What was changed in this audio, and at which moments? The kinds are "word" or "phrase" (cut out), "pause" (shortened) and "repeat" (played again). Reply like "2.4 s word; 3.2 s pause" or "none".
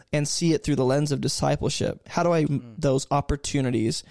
2.5 s phrase